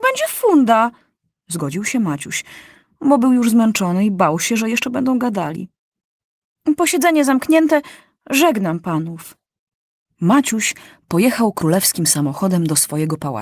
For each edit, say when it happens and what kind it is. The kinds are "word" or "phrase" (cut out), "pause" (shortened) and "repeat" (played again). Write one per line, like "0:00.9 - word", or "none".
none